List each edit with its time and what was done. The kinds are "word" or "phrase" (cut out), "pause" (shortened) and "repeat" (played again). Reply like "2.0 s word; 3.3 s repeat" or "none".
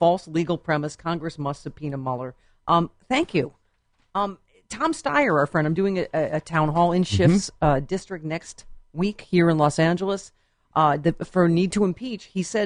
none